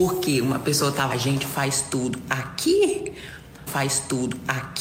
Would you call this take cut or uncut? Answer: cut